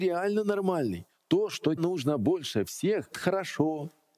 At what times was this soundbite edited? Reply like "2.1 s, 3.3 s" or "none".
1.8 s, 3.1 s